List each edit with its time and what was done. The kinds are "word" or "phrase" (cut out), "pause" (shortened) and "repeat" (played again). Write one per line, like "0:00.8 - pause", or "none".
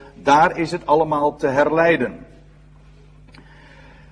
0:01.4 - word